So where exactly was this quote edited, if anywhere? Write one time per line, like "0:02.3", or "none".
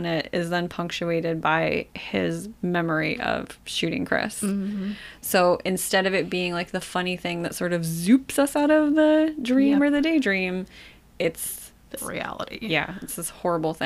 0:12.0